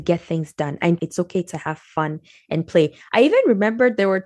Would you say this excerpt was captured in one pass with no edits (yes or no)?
no